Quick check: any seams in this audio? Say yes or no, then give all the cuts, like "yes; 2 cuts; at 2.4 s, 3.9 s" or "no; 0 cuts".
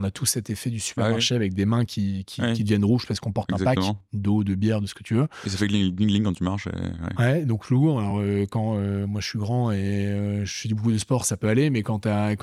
no; 0 cuts